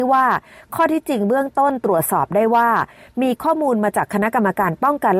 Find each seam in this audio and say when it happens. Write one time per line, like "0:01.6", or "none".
none